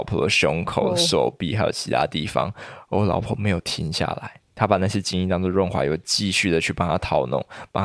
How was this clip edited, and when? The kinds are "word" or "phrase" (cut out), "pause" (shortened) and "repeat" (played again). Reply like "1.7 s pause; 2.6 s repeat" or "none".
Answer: 4.5 s pause